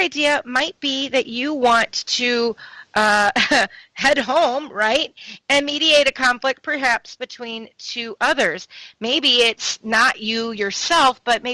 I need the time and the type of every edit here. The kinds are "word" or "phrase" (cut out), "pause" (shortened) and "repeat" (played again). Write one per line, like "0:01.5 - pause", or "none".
none